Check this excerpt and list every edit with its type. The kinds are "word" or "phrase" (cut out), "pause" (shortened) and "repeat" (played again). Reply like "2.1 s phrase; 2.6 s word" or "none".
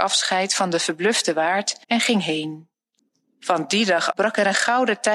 1.8 s pause; 3.0 s pause; 4.1 s word